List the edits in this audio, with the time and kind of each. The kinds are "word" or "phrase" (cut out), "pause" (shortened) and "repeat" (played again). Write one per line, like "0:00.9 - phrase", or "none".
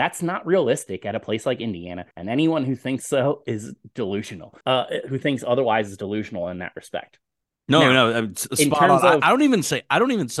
0:02.1 - pause
0:04.6 - pause
0:07.4 - pause